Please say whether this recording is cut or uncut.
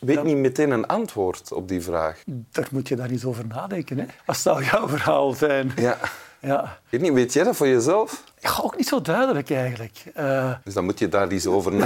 cut